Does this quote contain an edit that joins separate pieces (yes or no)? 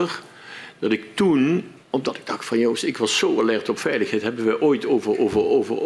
yes